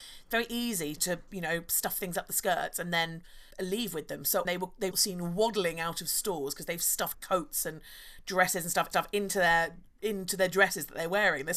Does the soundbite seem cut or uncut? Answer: cut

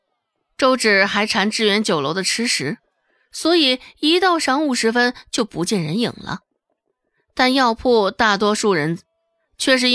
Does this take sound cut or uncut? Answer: uncut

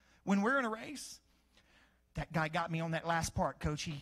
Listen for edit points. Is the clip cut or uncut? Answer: uncut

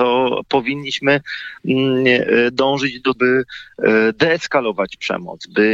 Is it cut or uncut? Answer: cut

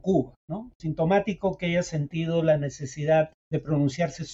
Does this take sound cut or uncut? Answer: cut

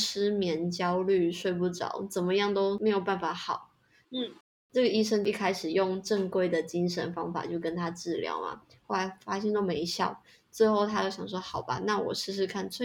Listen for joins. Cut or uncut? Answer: uncut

